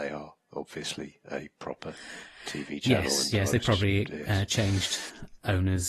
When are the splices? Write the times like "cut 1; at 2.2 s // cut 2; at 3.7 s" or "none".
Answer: none

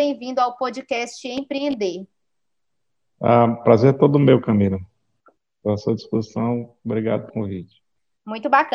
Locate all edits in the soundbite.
cut 1; at 7.3 s

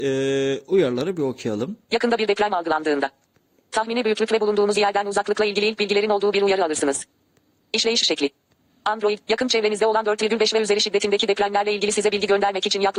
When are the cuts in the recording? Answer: none

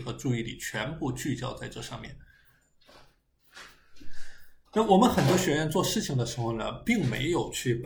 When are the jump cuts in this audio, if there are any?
cut 1; at 4.6 s

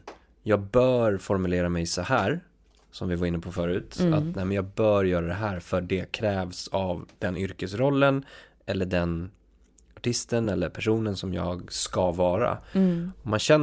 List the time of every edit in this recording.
none

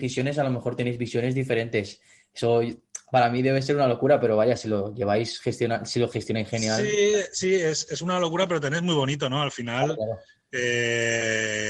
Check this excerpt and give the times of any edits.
none

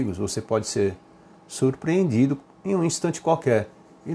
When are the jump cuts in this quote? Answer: none

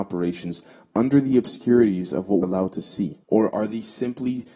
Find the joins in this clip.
cut 1; at 2.4 s // cut 2; at 3.2 s

